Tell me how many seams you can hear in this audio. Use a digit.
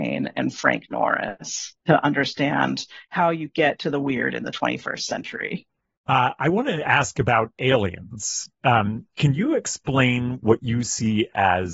1